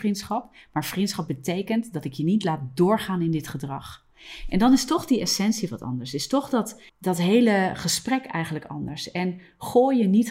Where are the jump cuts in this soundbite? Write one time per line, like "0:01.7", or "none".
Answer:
0:06.9